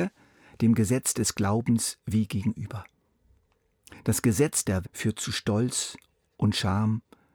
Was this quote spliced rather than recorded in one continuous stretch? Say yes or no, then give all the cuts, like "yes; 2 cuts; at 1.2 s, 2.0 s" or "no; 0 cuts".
yes; 1 cut; at 4.8 s